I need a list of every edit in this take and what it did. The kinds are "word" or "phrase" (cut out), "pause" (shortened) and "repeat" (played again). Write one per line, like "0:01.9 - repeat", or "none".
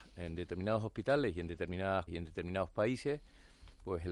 0:02.1 - word